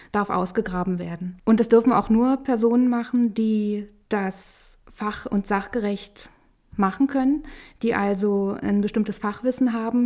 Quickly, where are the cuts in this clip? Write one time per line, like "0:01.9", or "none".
none